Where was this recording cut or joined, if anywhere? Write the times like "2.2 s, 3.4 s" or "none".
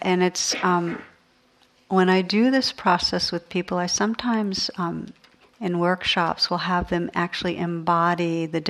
none